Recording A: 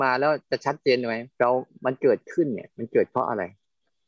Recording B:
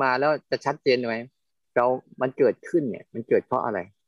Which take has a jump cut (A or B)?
A